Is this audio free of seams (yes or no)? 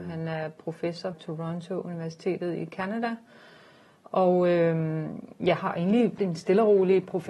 no